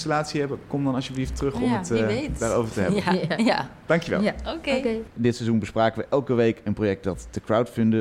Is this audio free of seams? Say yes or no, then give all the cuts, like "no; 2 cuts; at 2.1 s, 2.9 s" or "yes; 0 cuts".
yes; 0 cuts